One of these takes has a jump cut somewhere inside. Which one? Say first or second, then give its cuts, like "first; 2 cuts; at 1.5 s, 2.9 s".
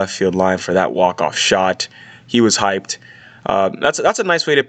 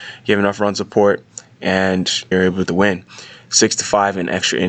second; 2 cuts; at 2.3 s, 2.7 s